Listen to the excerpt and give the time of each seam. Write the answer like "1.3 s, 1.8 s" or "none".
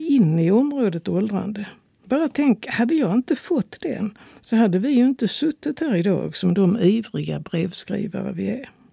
none